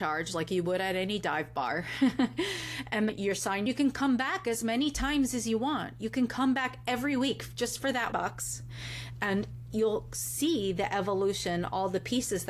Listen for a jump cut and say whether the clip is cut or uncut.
cut